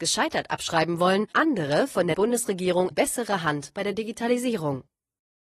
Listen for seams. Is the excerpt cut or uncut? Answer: cut